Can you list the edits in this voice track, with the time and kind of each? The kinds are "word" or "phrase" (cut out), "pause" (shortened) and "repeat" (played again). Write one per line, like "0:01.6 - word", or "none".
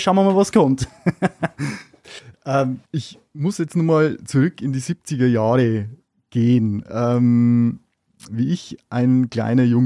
0:02.8 - pause